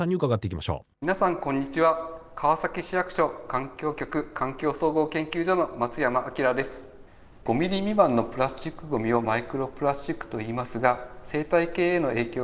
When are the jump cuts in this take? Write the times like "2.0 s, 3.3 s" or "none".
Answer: 0.9 s